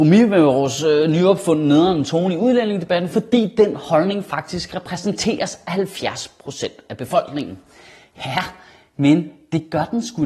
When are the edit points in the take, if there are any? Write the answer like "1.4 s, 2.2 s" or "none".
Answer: none